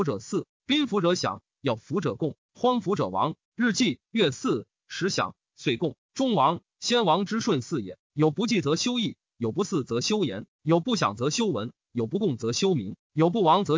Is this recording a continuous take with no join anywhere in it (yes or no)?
no